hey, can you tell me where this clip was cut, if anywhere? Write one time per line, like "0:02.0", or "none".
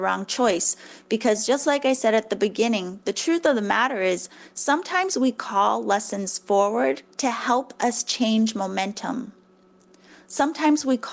0:07.1